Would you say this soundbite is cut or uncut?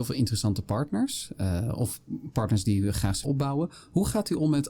cut